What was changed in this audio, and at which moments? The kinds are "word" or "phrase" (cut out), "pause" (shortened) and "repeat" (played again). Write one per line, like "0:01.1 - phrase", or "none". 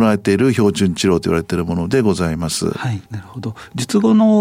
0:03.1 - pause